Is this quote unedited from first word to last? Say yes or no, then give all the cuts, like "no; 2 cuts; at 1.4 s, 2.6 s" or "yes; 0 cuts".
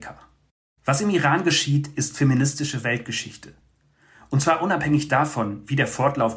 yes; 0 cuts